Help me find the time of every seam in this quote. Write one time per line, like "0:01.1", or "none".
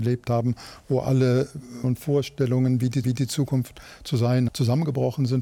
0:01.8
0:03.0
0:04.5